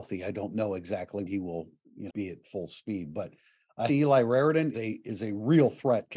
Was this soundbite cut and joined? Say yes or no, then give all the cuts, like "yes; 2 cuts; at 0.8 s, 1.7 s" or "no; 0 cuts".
yes; 5 cuts; at 1.3 s, 2.1 s, 2.4 s, 3.9 s, 4.7 s